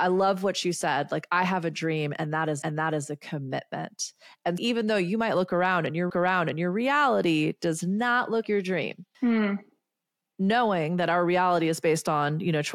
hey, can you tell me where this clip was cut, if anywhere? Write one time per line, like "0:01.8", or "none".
0:02.6
0:04.6
0:06.1
0:08.4
0:09.1